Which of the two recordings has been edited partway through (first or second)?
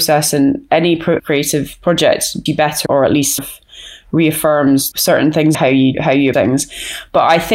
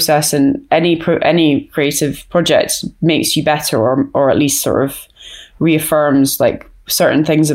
first